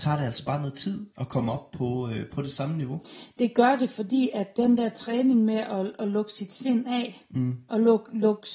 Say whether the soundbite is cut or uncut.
cut